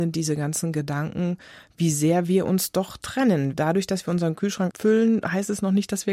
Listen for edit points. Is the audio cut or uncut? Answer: cut